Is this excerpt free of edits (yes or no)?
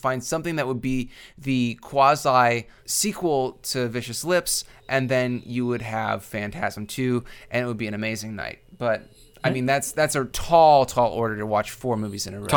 yes